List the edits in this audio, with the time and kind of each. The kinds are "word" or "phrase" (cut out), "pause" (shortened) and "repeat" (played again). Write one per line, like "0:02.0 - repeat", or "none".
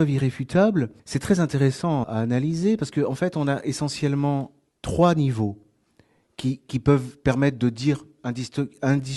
0:01.0 - pause
0:02.0 - word
0:04.7 - pause